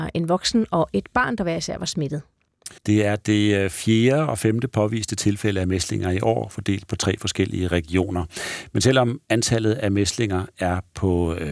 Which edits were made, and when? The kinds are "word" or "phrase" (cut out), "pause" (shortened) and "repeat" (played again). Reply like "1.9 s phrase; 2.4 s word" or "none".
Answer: 2.8 s pause; 9.2 s pause